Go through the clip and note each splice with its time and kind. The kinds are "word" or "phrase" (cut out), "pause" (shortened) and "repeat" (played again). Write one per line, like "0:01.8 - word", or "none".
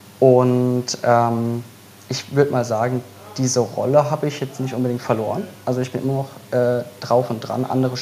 none